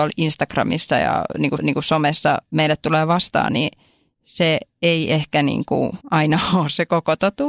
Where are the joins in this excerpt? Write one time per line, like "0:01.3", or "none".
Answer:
0:01.6
0:06.0